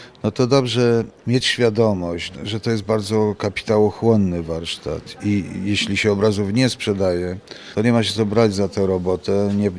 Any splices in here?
no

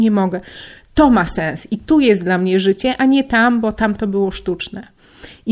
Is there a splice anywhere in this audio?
no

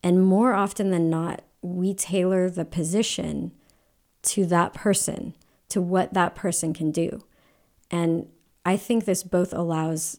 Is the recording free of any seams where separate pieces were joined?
yes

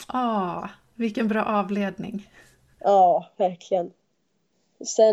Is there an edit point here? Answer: no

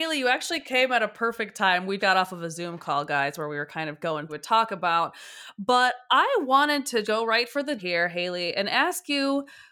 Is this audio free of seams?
no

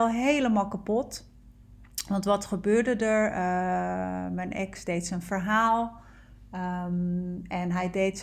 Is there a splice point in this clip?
no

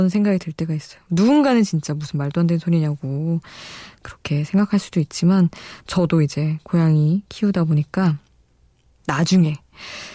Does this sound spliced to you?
no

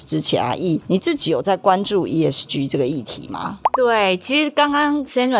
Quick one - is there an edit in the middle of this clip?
no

